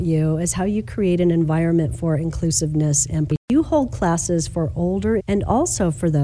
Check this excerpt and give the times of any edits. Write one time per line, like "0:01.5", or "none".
0:05.2